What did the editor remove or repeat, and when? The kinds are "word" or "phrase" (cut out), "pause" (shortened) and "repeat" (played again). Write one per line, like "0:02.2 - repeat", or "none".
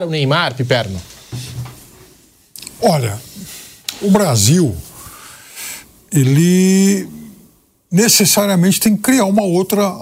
none